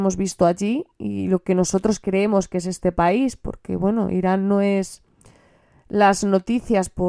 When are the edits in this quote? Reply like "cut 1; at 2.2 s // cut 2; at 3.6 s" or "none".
none

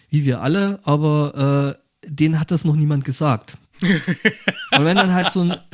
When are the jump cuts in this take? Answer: cut 1; at 3.6 s

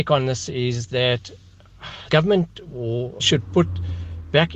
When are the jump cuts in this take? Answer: cut 1; at 2.1 s // cut 2; at 3.2 s

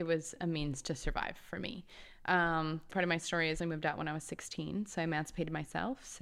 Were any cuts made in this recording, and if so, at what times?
cut 1; at 2.9 s // cut 2; at 3.6 s

